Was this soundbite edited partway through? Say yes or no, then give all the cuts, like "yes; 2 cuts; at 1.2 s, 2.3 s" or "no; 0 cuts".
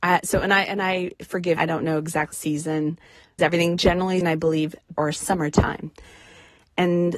yes; 6 cuts; at 1.6 s, 2.3 s, 3.4 s, 3.8 s, 4.2 s, 5.0 s